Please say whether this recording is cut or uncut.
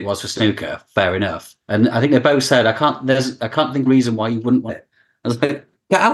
cut